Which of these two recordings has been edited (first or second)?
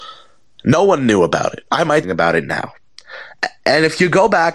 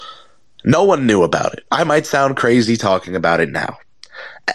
first